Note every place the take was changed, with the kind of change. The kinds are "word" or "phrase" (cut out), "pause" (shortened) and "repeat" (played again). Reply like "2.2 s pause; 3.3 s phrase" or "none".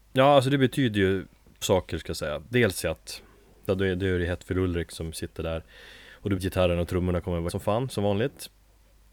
1.6 s word; 3.7 s word; 6.4 s word; 7.5 s word

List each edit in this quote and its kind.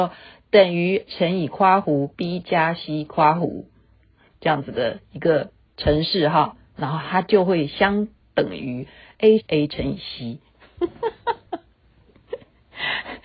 1.1 s word; 9.4 s phrase

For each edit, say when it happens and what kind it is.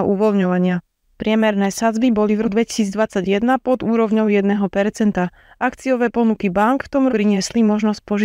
2.4 s word; 7.1 s word

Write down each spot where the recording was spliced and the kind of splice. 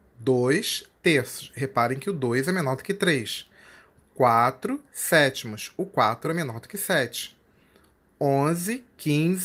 none

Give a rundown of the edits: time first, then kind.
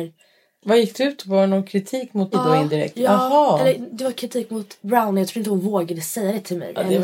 2.3 s word

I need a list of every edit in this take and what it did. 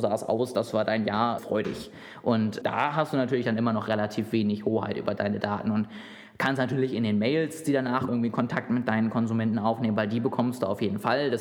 1.4 s word; 2.6 s word; 8.1 s word

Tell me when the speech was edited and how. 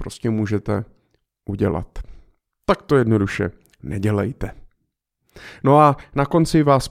none

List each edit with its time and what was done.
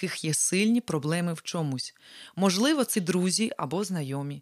2.9 s word

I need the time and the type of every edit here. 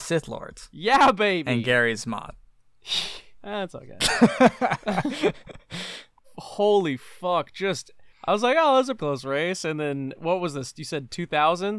6.2 s word; 8.1 s pause; 9.0 s word

